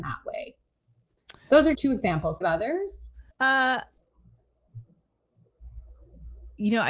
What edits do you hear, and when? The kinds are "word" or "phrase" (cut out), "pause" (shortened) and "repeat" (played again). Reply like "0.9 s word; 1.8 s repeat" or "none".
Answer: 1.7 s word; 2.4 s phrase; 3.3 s pause